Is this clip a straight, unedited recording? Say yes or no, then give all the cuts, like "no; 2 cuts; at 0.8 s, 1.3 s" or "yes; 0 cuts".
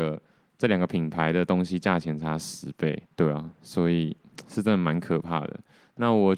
no; 1 cut; at 3.1 s